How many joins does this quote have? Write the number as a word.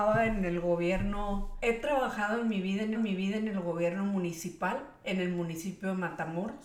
one